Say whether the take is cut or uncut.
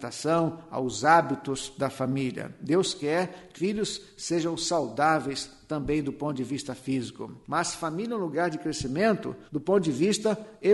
cut